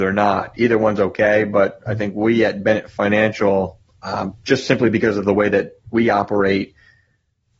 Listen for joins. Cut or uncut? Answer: uncut